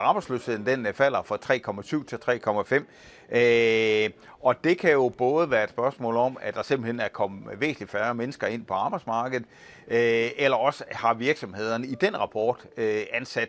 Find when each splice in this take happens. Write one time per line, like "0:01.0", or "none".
none